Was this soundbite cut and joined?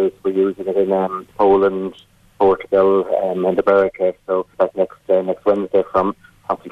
yes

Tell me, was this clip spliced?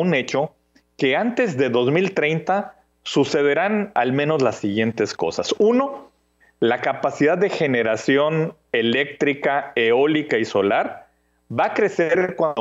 no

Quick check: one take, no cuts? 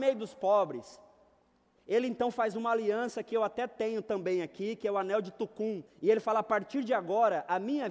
no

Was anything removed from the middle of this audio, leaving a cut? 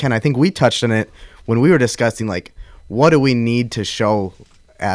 no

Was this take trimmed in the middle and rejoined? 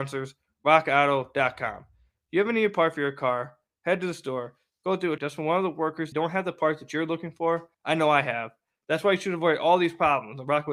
yes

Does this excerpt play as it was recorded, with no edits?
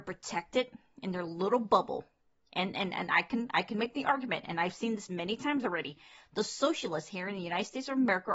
yes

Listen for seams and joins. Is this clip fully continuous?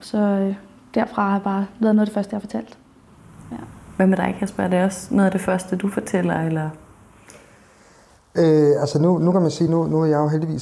yes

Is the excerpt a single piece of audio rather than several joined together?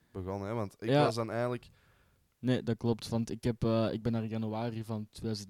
yes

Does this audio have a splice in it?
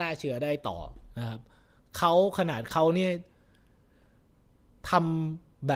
no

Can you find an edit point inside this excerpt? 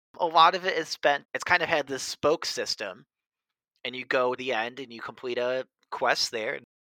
yes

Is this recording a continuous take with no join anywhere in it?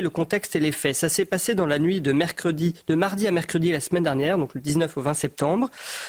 yes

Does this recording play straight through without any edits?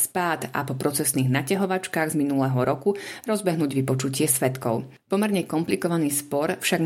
yes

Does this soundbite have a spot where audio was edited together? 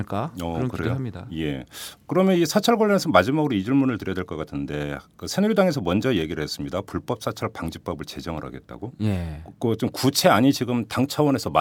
no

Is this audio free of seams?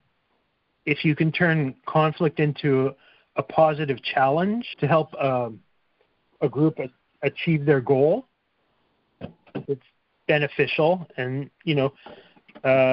no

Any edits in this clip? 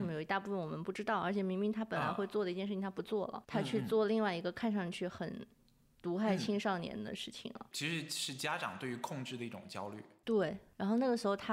yes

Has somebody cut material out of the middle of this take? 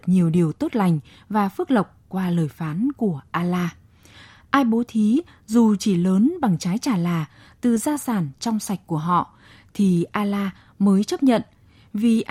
no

